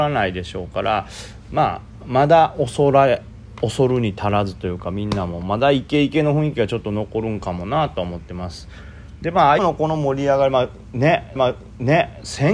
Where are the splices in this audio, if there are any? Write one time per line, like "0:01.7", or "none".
0:09.6
0:11.4